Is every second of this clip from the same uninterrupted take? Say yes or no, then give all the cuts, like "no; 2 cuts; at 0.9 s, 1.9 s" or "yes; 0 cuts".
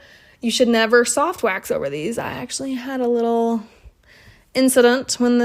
yes; 0 cuts